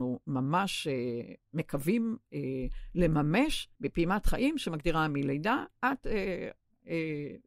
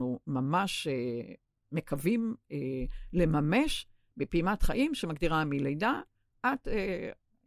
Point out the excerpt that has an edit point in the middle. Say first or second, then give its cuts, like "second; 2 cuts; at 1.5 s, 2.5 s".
first; 3 cuts; at 1.4 s, 3.7 s, 5.8 s